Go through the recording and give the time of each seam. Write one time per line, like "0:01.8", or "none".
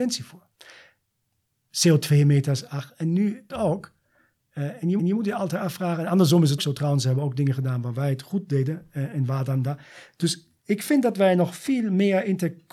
0:03.5
0:05.0
0:06.6
0:10.6